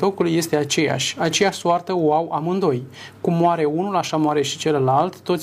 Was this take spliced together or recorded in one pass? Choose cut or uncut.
uncut